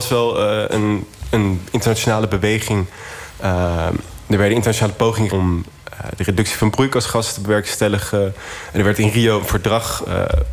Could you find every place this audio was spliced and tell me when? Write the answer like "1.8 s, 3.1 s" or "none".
5.3 s